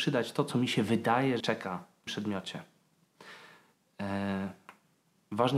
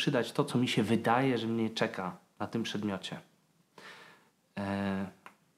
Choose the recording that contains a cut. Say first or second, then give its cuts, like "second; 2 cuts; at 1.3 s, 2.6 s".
first; 2 cuts; at 1.4 s, 2.1 s